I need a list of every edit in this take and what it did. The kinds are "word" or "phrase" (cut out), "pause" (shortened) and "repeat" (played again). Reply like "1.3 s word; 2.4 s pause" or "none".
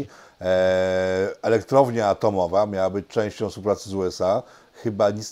none